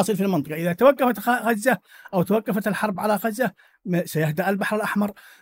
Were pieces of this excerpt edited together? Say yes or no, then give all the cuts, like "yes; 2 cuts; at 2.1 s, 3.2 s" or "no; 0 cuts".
no; 0 cuts